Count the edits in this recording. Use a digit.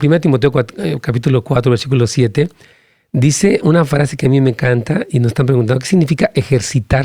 1